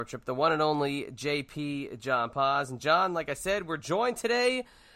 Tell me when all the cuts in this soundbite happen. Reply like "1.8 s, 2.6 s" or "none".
none